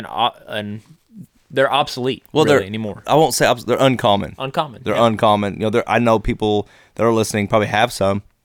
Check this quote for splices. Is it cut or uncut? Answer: uncut